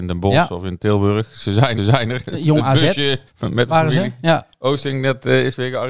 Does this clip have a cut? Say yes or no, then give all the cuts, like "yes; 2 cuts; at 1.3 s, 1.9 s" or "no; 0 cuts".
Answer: yes; 2 cuts; at 1.8 s, 3.3 s